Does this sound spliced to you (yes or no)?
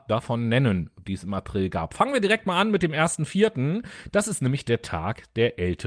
no